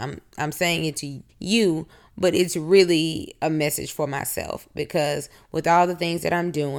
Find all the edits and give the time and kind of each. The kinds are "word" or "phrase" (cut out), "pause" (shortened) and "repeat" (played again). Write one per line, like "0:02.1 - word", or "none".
0:01.3 - pause